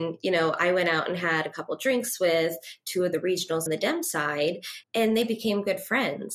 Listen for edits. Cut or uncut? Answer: cut